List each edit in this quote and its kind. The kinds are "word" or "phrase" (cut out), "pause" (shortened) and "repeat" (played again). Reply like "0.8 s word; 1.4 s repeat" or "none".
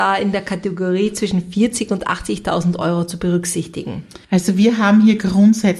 4.2 s pause